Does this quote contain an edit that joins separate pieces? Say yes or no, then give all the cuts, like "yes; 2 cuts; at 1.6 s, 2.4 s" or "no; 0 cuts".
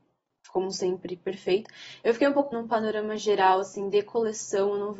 yes; 1 cut; at 2.5 s